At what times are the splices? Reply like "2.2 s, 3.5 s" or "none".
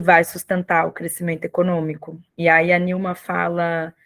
2.3 s